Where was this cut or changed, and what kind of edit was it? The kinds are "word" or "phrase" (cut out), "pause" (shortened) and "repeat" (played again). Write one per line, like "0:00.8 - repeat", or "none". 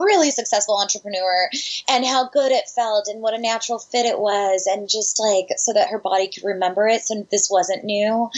none